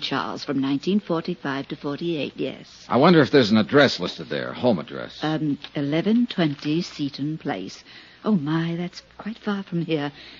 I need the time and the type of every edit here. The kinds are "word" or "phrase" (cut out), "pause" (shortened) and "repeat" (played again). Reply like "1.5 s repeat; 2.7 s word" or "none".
none